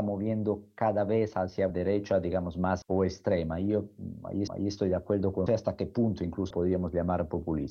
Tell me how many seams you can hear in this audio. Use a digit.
5